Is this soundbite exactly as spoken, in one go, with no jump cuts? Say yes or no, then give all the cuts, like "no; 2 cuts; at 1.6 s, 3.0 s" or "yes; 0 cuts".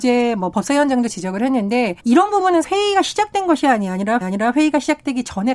no; 3 cuts; at 2.0 s, 2.6 s, 4.2 s